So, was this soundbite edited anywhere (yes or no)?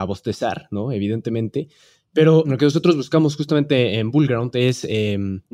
no